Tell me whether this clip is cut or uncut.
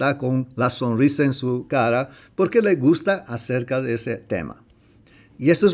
uncut